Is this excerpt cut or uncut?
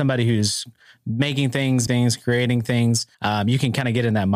cut